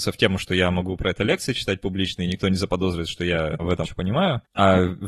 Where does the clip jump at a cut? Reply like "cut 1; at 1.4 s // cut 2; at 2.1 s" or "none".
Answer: cut 1; at 3.8 s